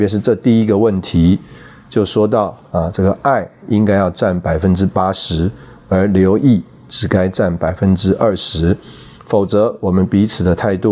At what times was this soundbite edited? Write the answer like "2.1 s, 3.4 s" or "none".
none